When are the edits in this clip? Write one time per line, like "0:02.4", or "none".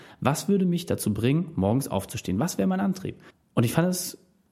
0:03.3

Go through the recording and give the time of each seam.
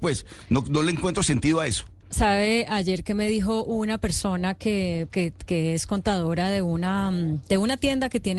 0:02.0
0:05.1

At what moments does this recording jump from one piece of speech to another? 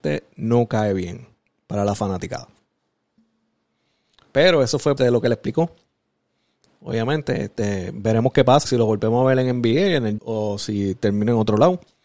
0:05.0
0:08.6
0:10.2

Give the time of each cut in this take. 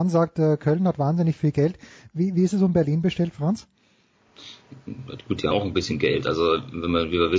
0:05.5

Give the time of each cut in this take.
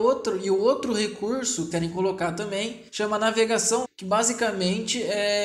0:01.7
0:02.9
0:03.8

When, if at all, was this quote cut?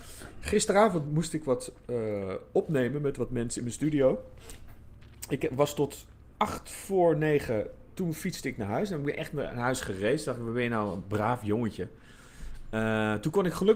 0:06.3

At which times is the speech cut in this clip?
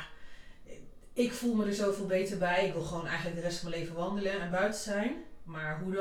none

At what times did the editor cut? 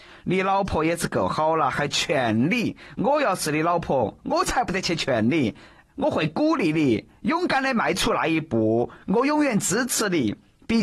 none

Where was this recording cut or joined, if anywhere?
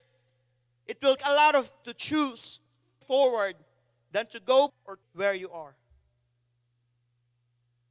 0:01.2
0:01.8
0:03.0
0:04.7
0:05.0

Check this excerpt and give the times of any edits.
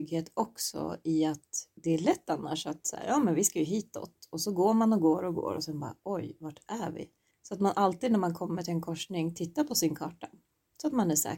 0:01.8
0:07.3

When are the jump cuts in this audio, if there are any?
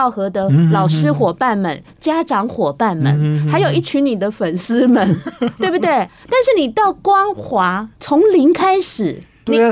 0:07.9

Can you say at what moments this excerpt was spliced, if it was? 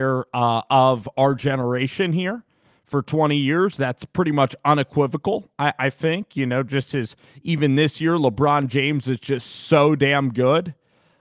none

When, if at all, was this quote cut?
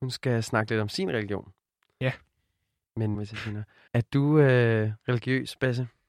0:03.1
0:03.9

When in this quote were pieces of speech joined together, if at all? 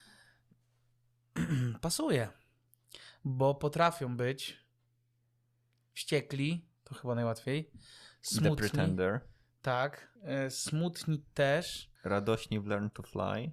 0:06.8
0:10.2
0:12.0

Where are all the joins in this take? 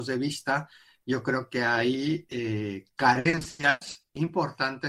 none

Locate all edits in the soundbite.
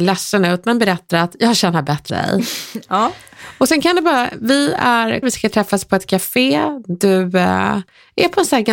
0:02.1
0:05.2

